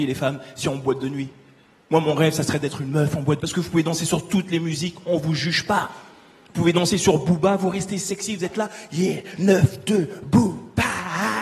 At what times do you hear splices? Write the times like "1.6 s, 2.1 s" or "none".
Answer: 3.4 s